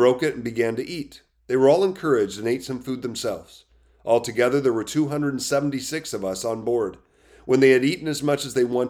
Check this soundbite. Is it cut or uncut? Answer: uncut